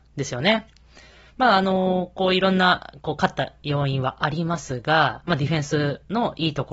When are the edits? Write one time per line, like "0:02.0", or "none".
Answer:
0:01.1